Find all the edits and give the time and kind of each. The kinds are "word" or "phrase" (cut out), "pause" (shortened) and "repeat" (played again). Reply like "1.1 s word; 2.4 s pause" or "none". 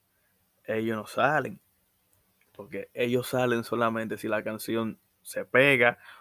none

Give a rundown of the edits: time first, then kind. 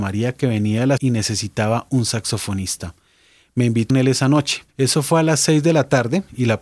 1.0 s word; 3.9 s phrase; 4.7 s pause

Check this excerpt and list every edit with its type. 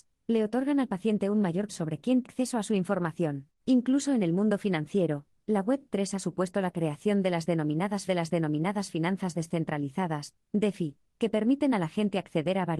1.7 s word; 2.2 s word; 8.1 s repeat

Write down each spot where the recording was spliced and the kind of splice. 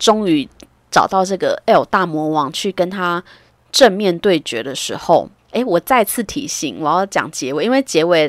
5.4 s pause

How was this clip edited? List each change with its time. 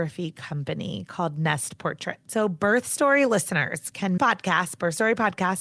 4.2 s phrase

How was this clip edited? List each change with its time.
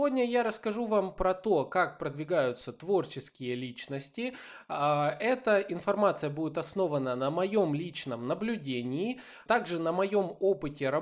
none

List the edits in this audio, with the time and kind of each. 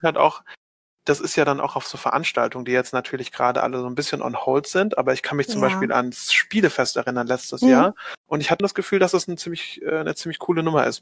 8.2 s pause; 8.6 s word

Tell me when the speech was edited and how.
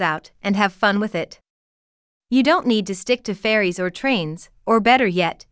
none

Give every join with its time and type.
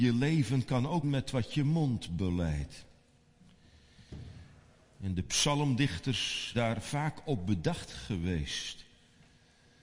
1.0 s word; 6.5 s word

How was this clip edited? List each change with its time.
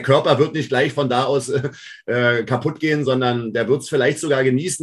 none

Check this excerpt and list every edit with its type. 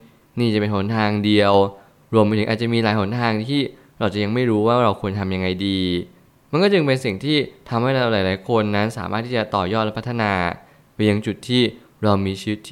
none

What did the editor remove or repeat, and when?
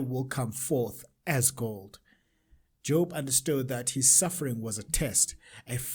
none

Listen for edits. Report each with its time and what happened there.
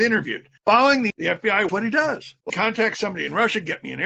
1.1 s word; 1.7 s word; 2.5 s word

